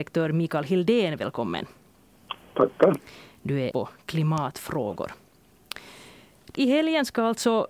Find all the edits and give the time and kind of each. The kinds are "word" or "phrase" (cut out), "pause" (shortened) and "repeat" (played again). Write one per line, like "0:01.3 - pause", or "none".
0:03.7 - word
0:06.5 - word